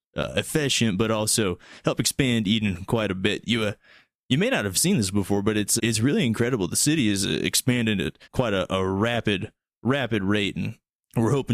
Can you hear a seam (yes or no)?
yes